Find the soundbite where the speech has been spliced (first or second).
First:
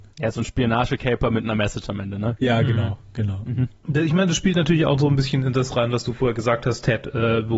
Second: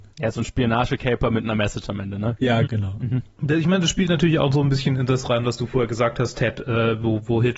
second